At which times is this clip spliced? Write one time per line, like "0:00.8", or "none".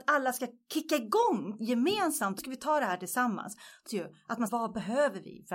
0:02.4
0:03.9
0:04.5